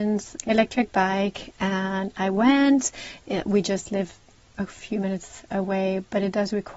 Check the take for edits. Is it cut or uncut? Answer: uncut